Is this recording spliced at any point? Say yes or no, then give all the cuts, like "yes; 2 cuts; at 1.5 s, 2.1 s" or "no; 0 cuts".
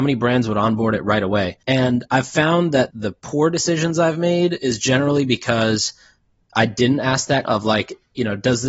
yes; 2 cuts; at 1.6 s, 7.4 s